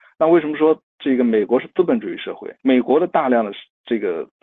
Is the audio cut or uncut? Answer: cut